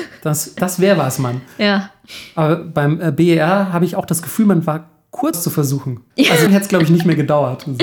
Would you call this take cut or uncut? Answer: cut